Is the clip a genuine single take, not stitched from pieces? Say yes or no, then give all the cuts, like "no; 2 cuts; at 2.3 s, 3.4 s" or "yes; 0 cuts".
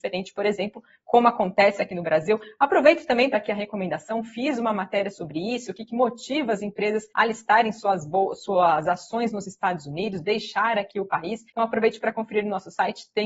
no; 3 cuts; at 3.3 s, 7.1 s, 11.5 s